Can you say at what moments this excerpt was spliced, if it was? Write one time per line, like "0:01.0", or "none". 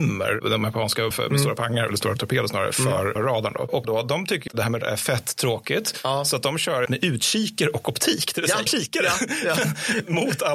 0:01.1
0:01.9
0:03.2
0:03.8
0:04.5
0:04.8
0:06.9
0:08.7